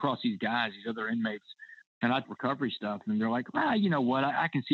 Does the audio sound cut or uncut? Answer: cut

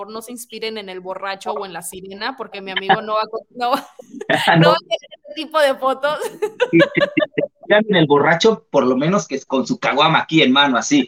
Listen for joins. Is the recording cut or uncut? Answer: uncut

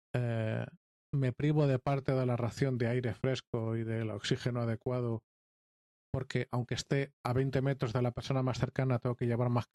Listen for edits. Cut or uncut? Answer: uncut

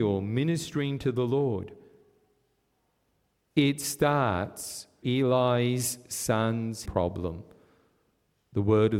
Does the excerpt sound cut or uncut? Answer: cut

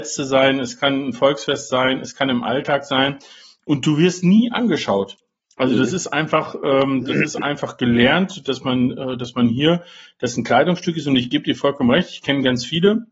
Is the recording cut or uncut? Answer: uncut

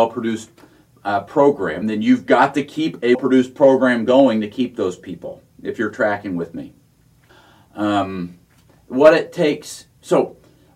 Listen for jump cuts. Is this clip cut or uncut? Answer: cut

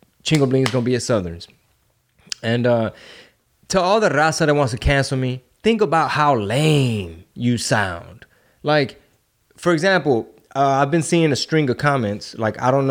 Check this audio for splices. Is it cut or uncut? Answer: uncut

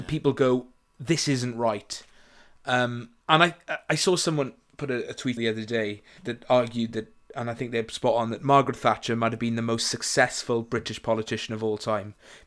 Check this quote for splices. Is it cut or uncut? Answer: cut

